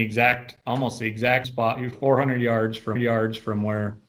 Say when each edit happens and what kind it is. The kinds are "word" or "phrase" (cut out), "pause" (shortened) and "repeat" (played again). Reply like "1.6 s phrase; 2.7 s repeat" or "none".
1.4 s word; 1.9 s word; 3.0 s repeat